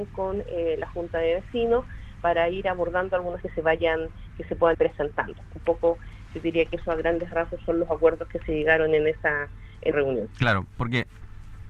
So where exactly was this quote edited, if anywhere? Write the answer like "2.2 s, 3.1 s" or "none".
3.4 s, 4.7 s, 9.9 s